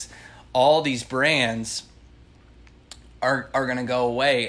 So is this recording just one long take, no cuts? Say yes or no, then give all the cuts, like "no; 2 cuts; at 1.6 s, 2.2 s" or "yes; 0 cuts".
yes; 0 cuts